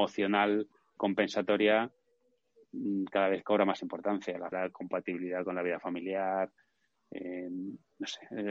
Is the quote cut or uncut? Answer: cut